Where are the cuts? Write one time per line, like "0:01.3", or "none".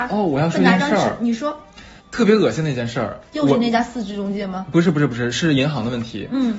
0:02.0